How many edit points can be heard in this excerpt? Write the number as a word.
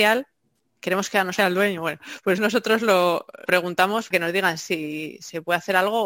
four